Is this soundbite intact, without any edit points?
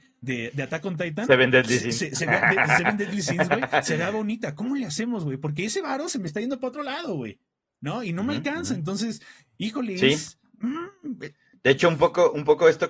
yes; 0 cuts

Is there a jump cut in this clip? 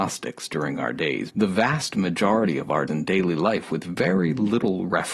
yes; 2 cuts; at 1.3 s, 2.9 s

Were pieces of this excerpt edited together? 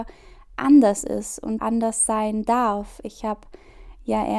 yes; 1 cut; at 1.6 s

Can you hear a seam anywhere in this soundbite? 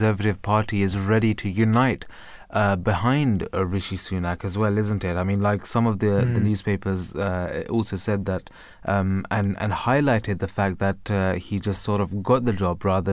no; 0 cuts

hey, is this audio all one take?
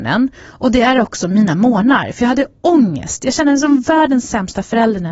yes; 0 cuts

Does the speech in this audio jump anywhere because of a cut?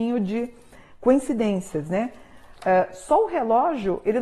no; 0 cuts

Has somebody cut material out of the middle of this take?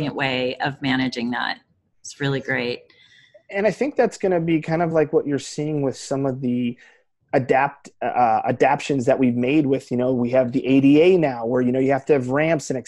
no; 0 cuts

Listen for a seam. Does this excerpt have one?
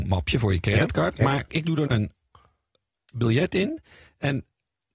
yes; 2 cuts; at 1.5 s, 1.9 s

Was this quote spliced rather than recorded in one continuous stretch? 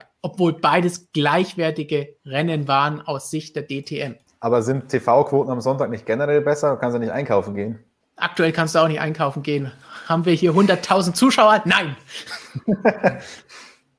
yes; 2 cuts; at 4.3 s, 8.0 s

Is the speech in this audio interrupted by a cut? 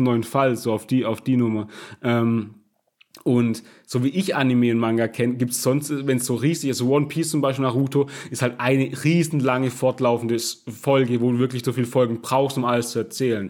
no; 0 cuts

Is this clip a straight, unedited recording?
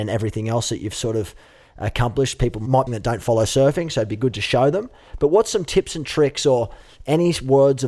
no; 1 cut; at 2.9 s

